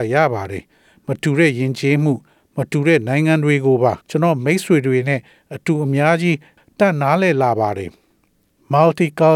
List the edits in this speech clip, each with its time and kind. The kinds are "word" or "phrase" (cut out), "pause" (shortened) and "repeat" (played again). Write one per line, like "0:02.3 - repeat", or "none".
0:04.0 - pause